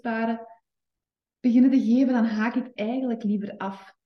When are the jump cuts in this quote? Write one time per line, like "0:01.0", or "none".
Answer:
none